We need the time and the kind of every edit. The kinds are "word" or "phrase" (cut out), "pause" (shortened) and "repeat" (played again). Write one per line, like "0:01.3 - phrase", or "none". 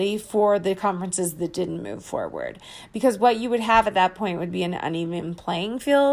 none